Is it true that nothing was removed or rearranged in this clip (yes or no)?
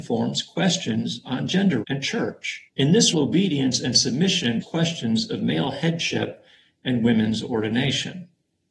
no